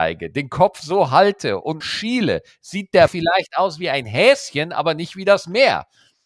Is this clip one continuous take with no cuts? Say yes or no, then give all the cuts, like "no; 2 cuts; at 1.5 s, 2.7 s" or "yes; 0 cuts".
no; 2 cuts; at 1.8 s, 3.1 s